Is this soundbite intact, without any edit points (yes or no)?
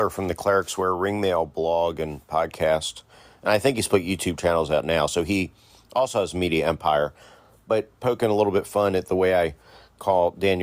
yes